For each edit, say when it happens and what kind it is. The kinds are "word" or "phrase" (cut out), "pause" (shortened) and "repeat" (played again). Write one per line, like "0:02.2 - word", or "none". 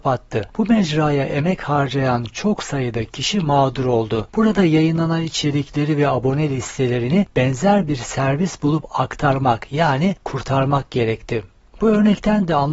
none

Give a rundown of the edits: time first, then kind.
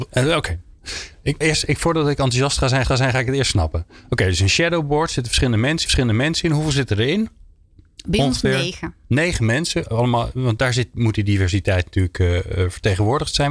0:01.4 - word
0:02.8 - repeat
0:05.9 - repeat

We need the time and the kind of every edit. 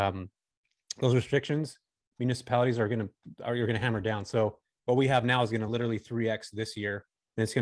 none

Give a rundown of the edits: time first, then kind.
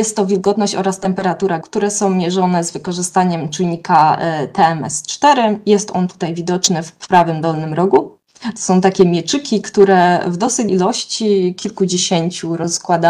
0:01.6 - word
0:10.7 - word

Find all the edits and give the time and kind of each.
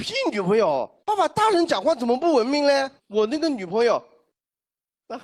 0:01.0 - pause
0:03.0 - pause

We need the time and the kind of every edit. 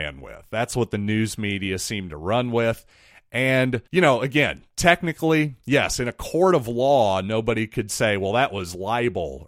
0:03.9 - pause

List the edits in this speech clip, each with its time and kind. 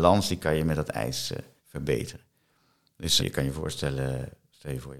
0:01.6 - pause
0:03.2 - word

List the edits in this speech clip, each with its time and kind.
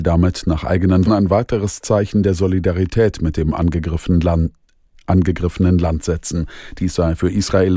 0:01.1 - word

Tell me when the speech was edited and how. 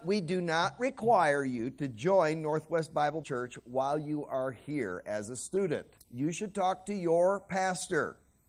0:03.2 - word
0:06.0 - pause

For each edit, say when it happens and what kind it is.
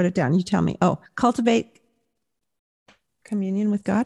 0:01.1 - pause

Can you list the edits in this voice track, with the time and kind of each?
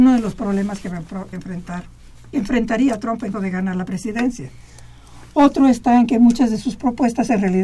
0:01.3 - word
0:03.3 - word

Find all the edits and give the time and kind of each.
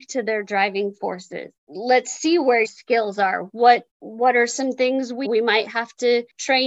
0:01.6 - pause
0:02.6 - word
0:03.9 - pause
0:05.2 - word

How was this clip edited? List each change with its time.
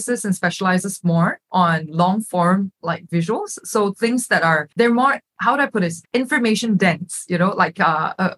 0:04.7 - pause
0:06.0 - pause

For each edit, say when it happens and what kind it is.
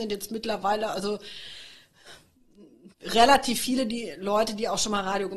0:02.9 - pause

